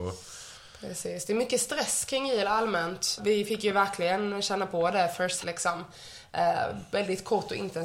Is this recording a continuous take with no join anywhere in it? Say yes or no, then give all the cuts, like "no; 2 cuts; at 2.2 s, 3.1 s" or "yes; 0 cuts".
no; 2 cuts; at 3.2 s, 5.4 s